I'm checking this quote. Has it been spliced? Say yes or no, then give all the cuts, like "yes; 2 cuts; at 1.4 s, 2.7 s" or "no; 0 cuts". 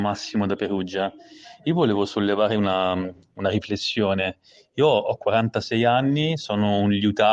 no; 0 cuts